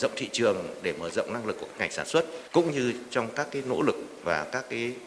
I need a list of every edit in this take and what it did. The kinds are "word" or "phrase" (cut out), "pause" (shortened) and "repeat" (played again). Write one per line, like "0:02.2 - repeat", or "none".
0:02.5 - pause

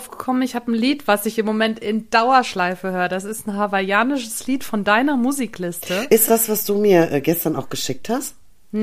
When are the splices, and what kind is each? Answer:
0:06.3 - word

